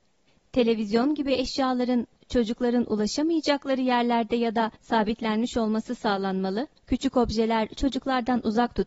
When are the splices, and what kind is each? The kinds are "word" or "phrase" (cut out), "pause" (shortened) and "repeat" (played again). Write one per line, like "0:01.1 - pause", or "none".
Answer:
0:04.8 - pause
0:06.8 - pause